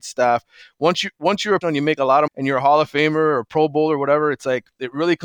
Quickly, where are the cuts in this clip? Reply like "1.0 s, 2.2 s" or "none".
1.6 s, 2.3 s